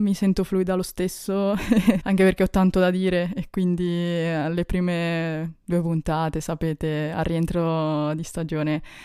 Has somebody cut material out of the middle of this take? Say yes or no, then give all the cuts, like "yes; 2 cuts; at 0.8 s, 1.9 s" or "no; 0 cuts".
yes; 1 cut; at 2.0 s